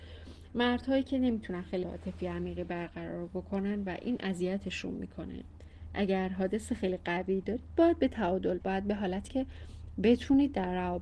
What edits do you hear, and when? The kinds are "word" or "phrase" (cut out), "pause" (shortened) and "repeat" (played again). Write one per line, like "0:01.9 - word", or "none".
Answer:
0:01.8 - word
0:08.6 - word
0:09.3 - word